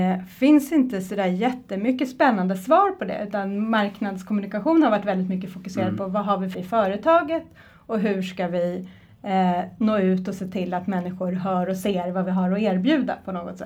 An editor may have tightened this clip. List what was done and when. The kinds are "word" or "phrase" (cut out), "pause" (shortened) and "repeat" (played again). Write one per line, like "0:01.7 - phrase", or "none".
0:06.5 - word